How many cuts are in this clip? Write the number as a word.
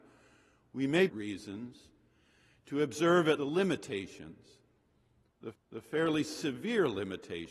three